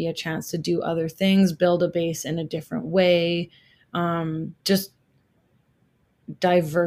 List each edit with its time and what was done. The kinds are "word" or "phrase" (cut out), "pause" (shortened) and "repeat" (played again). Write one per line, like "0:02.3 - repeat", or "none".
0:04.6 - pause